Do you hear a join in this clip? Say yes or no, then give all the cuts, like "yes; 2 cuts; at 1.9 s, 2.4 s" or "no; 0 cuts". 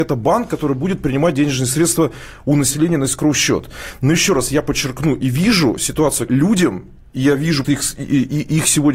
yes; 2 cuts; at 6.3 s, 7.6 s